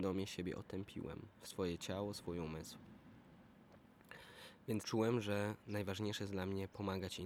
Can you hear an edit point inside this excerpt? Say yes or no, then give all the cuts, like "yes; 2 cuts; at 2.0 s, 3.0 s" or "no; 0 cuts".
yes; 2 cuts; at 1.4 s, 4.8 s